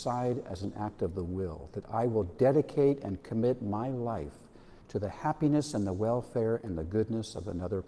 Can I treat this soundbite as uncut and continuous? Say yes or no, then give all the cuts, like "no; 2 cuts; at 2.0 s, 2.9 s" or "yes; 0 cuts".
no; 1 cut; at 4.8 s